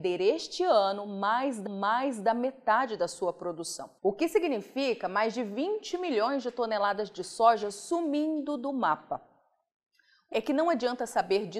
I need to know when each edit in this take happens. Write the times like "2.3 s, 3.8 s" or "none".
1.7 s, 4.0 s, 10.3 s